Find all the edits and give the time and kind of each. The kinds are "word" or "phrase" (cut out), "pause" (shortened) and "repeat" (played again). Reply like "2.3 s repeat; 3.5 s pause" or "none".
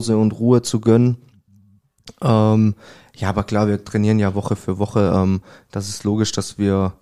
none

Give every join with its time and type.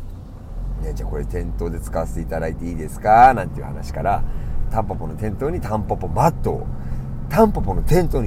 4.6 s word

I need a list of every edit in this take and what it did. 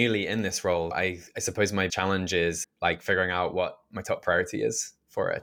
0.9 s word; 1.9 s word; 2.6 s word

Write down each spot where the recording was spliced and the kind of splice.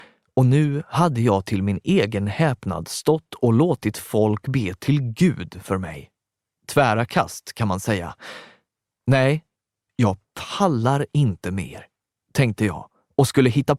none

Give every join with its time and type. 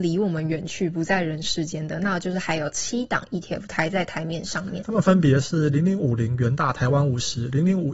none

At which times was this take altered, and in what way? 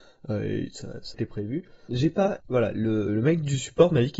1.1 s word; 1.9 s word; 2.4 s word; 3.1 s word

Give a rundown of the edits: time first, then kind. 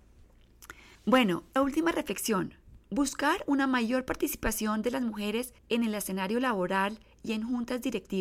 1.0 s pause; 1.6 s word; 2.8 s pause; 5.6 s pause

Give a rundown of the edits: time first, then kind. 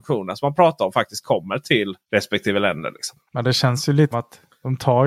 2.0 s pause; 3.3 s pause; 4.1 s word

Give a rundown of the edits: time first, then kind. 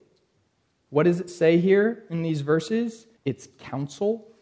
3.2 s pause

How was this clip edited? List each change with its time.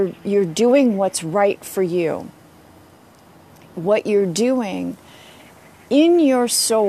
none

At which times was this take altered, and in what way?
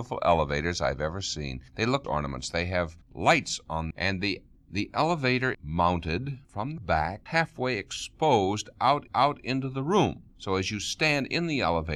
2.0 s phrase; 3.9 s phrase; 5.5 s word; 6.4 s pause; 7.3 s phrase; 9.1 s repeat

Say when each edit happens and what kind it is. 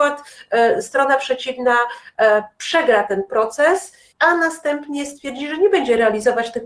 4.1 s pause

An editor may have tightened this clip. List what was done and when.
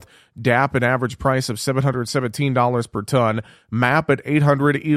none

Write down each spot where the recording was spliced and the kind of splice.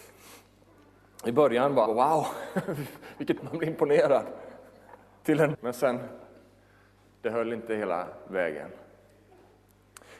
1.9 s word; 3.4 s word; 5.5 s word

